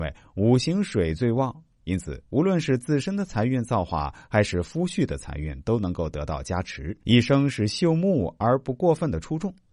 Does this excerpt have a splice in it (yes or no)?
yes